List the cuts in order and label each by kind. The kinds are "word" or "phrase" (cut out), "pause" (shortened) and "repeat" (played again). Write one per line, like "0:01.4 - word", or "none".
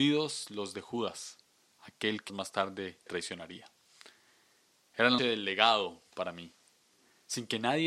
0:02.3 - word
0:03.1 - word
0:05.2 - word